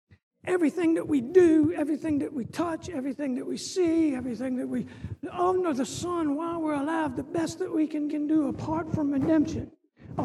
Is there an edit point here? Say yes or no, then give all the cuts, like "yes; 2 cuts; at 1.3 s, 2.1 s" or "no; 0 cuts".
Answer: yes; 1 cut; at 8.1 s